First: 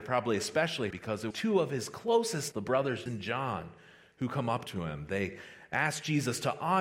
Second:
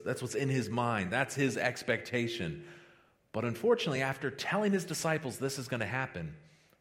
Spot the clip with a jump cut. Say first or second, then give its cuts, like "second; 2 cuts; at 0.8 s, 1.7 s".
first; 4 cuts; at 0.9 s, 1.3 s, 2.5 s, 3.1 s